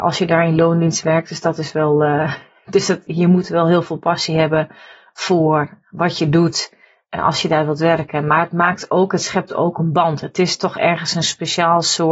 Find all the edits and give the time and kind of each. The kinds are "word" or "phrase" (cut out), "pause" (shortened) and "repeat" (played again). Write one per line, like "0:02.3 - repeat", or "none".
0:03.1 - word

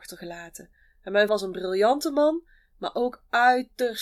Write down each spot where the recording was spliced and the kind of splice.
0:01.3 - word

